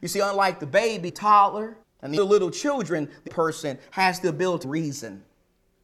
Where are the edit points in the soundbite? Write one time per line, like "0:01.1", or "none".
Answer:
0:01.1
0:01.8
0:02.2
0:03.3
0:04.6